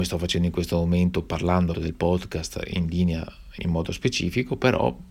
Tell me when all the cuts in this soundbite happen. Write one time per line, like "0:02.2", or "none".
0:01.7
0:03.6